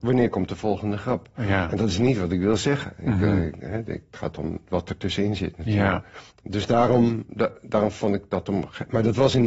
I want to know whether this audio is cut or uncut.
cut